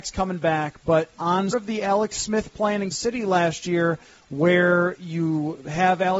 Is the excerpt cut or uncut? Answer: cut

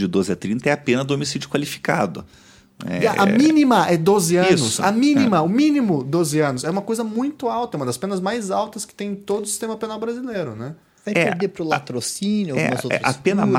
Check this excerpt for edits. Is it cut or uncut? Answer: uncut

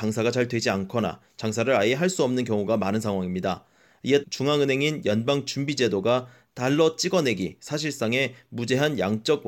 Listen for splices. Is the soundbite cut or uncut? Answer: cut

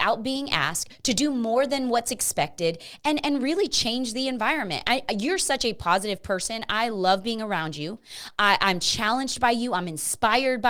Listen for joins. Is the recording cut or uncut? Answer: uncut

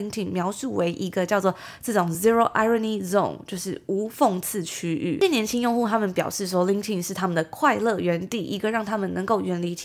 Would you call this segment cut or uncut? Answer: uncut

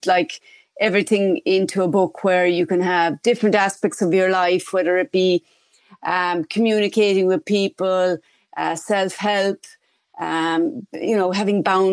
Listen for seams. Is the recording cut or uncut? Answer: uncut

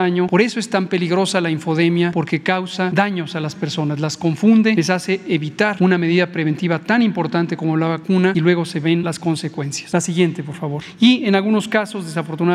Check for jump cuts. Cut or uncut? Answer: uncut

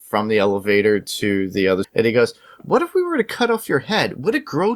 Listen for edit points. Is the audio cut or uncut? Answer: cut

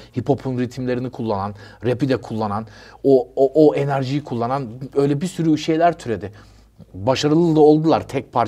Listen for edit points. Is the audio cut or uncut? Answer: uncut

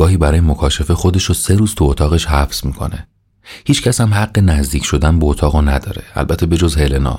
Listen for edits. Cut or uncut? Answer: uncut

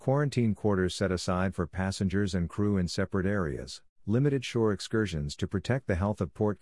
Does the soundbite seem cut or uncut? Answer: cut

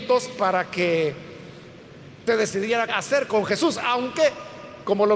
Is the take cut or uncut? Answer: cut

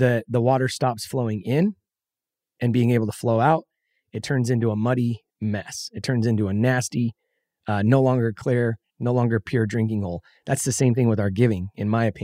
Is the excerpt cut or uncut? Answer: uncut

